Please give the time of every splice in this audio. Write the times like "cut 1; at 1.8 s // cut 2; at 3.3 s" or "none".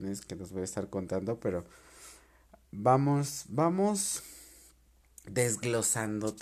cut 1; at 2.6 s